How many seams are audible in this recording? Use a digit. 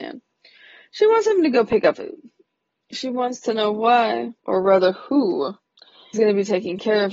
3